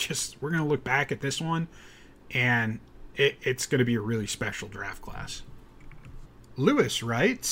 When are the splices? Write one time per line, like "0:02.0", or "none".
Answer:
none